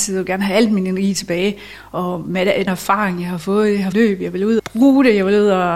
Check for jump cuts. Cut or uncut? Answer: cut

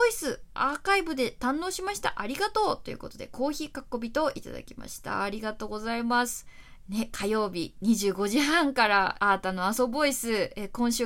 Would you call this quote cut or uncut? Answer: cut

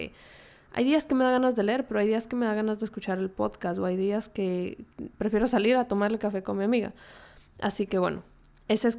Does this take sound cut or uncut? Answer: uncut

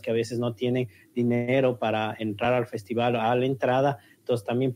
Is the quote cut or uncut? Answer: uncut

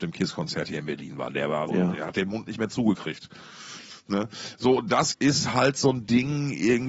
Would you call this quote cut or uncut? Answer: cut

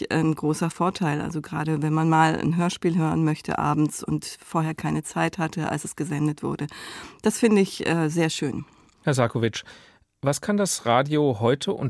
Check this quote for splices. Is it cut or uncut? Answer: uncut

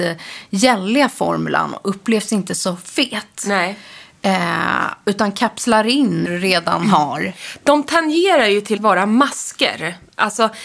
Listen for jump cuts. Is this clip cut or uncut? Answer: cut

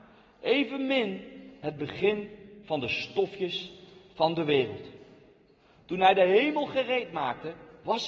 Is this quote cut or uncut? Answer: uncut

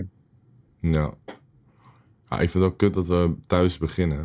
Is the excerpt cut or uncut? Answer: uncut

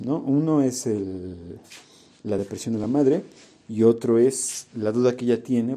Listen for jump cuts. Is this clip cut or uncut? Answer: uncut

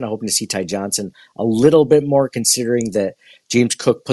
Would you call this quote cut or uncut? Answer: uncut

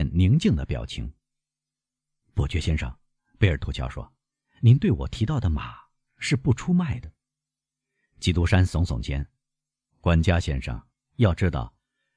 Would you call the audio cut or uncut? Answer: uncut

